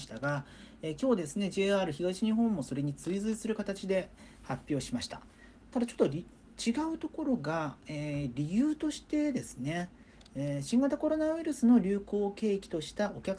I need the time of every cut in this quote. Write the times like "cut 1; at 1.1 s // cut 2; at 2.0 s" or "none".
none